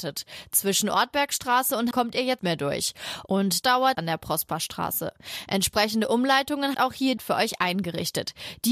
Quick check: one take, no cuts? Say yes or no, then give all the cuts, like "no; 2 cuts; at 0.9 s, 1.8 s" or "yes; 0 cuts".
no; 6 cuts; at 1.9 s, 2.4 s, 3.6 s, 3.9 s, 6.7 s, 7.2 s